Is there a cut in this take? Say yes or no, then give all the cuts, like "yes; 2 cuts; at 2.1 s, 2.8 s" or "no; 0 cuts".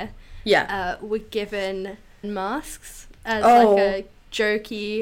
yes; 1 cut; at 2.2 s